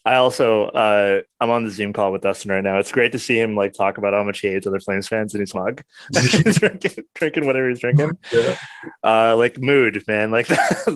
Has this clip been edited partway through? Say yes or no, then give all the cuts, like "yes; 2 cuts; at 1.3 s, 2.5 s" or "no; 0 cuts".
yes; 1 cut; at 5.5 s